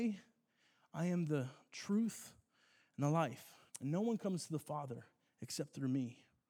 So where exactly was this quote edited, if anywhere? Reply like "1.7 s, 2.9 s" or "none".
3.7 s